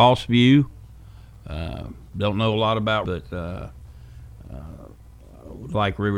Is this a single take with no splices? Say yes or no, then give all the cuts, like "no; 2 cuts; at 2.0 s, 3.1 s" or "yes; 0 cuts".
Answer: no; 1 cut; at 3.0 s